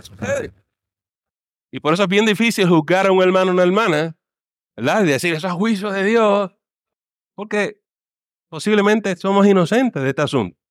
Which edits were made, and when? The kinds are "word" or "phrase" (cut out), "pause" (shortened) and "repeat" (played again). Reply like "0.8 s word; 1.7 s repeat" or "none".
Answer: none